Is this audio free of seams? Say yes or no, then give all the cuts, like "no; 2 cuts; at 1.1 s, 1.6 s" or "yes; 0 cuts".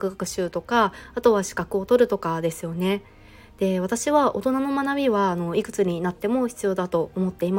yes; 0 cuts